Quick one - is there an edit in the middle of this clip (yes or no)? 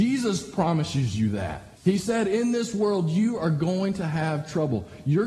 yes